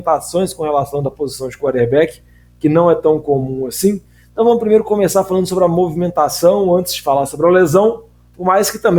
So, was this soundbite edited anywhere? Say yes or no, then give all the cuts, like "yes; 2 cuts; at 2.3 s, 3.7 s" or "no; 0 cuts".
no; 0 cuts